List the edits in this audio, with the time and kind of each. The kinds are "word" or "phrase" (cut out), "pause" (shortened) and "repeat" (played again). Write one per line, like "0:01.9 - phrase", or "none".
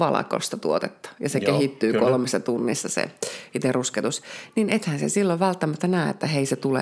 none

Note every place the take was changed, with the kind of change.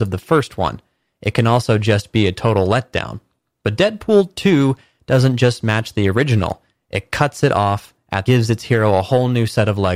0:08.3 - phrase

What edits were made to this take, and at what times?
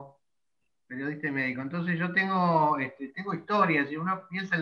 none

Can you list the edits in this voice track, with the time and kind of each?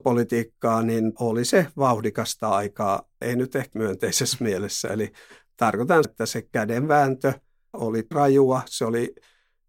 0:01.2 - word
0:03.2 - word
0:03.7 - word
0:06.0 - word
0:07.7 - word
0:08.1 - word

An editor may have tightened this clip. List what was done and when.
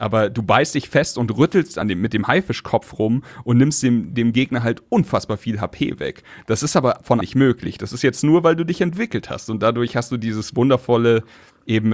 0:01.8 - phrase
0:07.2 - phrase

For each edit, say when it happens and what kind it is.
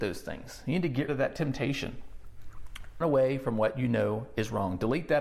0:01.1 - word
0:03.0 - word

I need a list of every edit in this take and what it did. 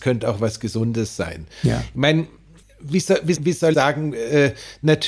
0:02.6 - word
0:03.4 - word
0:03.7 - word

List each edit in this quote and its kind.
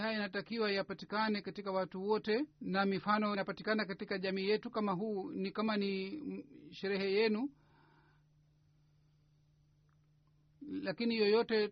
0:02.5 - pause
0:03.3 - word

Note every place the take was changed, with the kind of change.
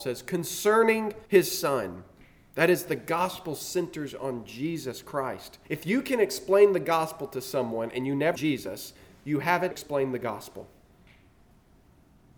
0:01.3 - pause
0:05.6 - pause
0:08.3 - word
0:09.7 - word

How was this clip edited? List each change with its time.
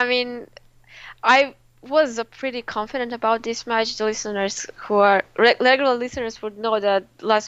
none

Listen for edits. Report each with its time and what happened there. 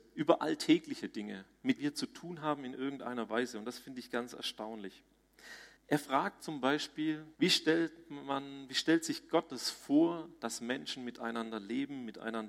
0:01.8 - word
0:05.8 - pause
0:07.3 - pause

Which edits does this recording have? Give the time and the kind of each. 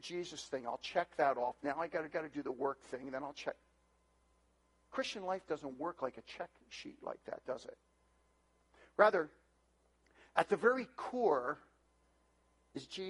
0:02.1 - repeat

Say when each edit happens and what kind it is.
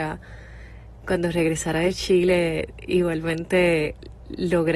0:01.0 - word

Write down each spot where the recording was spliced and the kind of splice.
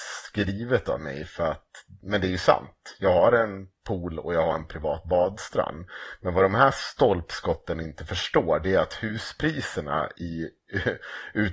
none

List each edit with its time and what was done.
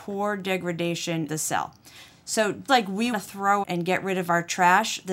0:01.3 - word
0:02.7 - word
0:03.1 - word
0:03.6 - word

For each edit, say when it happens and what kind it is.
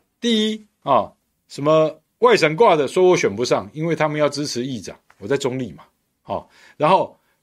none

